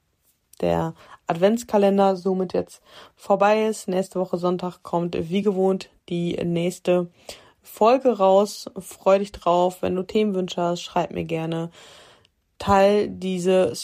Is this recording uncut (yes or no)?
yes